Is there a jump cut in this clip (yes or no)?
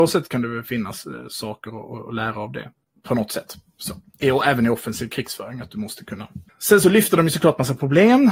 no